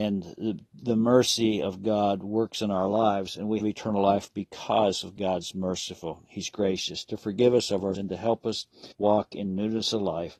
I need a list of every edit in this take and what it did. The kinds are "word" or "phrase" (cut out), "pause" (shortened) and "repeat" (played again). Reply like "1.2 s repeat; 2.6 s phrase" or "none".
3.6 s word; 7.9 s word; 8.9 s pause

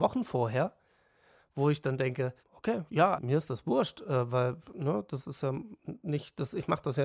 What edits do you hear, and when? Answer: 2.4 s pause; 3.1 s word

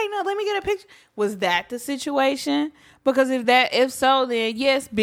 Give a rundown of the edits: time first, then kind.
none

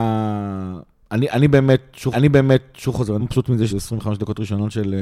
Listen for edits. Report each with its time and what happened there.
2.1 s repeat; 3.2 s word; 3.7 s phrase

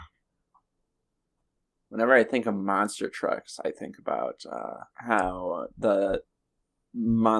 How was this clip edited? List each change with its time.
4.9 s pause

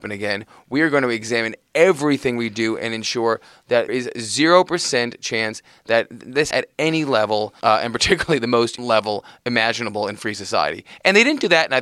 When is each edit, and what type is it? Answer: 3.9 s word; 6.5 s word; 7.6 s word; 8.8 s word

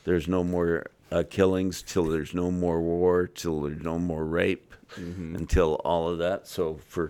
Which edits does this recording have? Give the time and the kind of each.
none

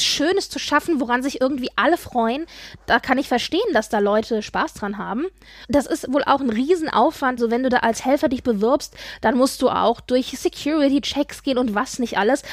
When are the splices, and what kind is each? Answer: none

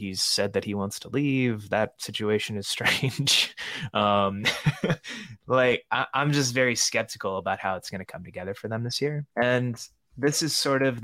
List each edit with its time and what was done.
9.3 s pause

